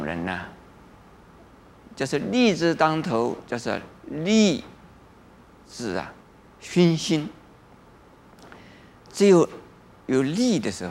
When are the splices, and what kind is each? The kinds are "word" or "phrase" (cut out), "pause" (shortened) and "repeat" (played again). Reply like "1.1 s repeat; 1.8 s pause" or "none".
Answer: 6.2 s pause